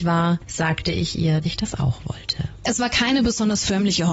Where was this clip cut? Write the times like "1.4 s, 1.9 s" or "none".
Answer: 1.4 s